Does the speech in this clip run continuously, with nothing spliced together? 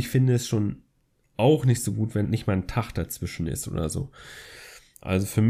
no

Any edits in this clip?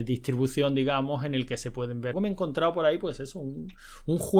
yes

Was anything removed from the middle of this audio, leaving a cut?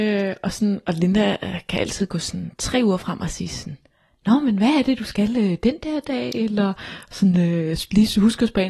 no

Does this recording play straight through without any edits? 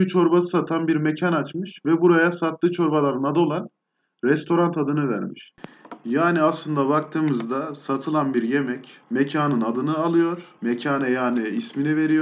no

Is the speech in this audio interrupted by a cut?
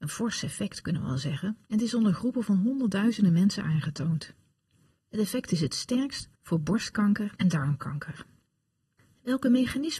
yes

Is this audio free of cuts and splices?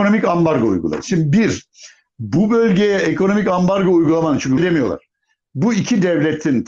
no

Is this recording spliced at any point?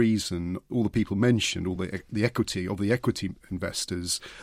no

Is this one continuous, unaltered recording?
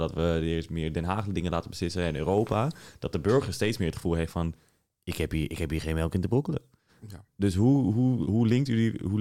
yes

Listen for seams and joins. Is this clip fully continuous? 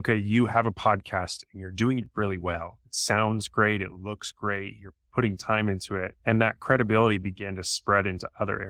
no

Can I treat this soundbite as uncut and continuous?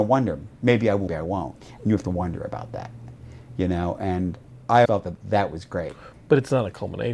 no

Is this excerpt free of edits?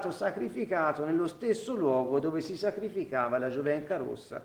yes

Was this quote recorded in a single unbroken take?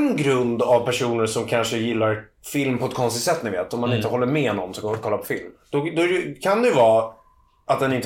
yes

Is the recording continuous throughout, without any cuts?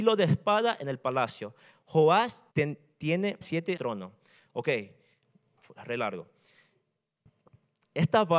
no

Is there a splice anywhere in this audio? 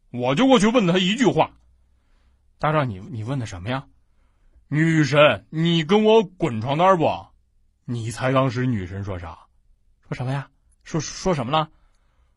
no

